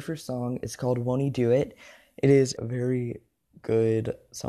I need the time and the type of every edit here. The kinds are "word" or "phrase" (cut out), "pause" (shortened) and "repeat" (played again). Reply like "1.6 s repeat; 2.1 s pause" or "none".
2.6 s word